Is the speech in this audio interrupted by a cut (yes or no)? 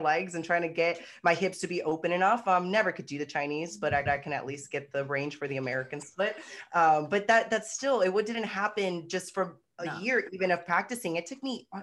yes